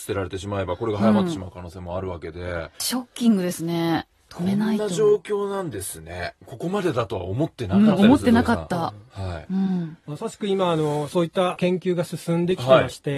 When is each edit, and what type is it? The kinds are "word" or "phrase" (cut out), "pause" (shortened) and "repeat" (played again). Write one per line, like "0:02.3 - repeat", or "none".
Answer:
0:02.7 - pause
0:06.4 - pause